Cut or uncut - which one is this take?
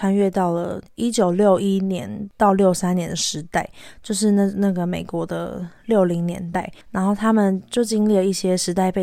cut